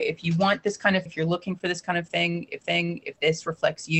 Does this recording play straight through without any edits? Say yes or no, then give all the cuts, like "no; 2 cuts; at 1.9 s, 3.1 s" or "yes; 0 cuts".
no; 2 cuts; at 1.1 s, 2.6 s